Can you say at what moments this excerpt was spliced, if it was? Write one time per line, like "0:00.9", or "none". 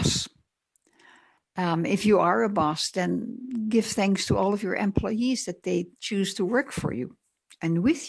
none